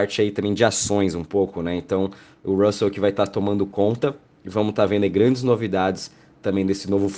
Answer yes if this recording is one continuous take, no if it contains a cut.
yes